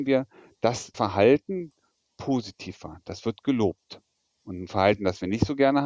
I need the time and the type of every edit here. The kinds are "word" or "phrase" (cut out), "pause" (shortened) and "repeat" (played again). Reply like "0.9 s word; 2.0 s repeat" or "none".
0.9 s word; 2.1 s word